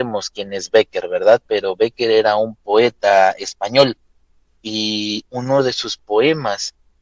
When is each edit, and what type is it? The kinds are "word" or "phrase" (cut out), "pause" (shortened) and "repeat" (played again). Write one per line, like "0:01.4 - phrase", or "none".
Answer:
none